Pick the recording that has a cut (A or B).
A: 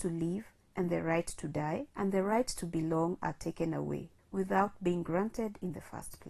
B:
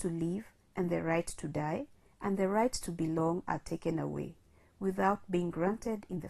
A